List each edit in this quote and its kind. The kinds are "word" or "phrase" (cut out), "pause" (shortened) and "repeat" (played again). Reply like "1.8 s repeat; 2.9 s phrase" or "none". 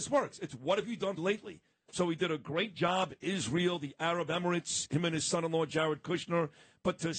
1.2 s phrase